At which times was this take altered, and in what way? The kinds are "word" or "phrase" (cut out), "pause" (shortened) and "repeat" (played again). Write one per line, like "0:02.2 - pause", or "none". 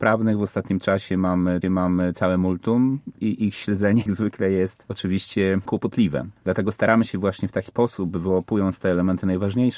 0:01.6 - repeat
0:04.1 - word
0:07.7 - word